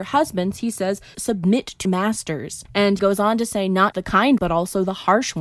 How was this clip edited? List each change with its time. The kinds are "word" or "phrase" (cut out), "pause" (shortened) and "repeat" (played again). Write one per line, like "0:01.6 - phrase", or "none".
0:01.1 - word
0:01.8 - word
0:03.0 - word
0:03.9 - word
0:04.4 - word